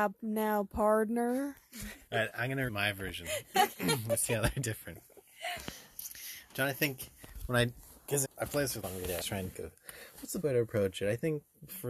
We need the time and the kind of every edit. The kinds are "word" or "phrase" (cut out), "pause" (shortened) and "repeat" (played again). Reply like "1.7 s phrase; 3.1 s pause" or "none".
2.1 s word; 2.7 s word; 8.2 s word; 8.8 s word; 9.2 s word; 9.5 s word; 10.4 s word